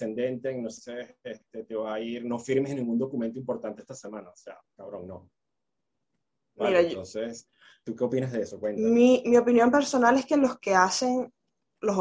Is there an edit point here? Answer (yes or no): no